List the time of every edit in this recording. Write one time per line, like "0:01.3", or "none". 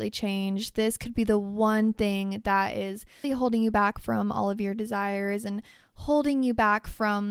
0:03.2